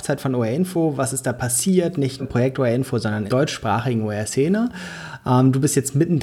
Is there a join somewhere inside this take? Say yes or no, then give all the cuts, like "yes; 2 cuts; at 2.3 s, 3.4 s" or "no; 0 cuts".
yes; 2 cuts; at 2.2 s, 3.3 s